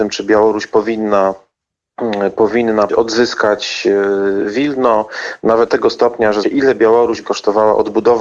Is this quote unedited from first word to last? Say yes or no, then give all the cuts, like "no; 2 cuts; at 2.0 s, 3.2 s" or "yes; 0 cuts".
no; 4 cuts; at 2.9 s, 5.7 s, 6.4 s, 7.2 s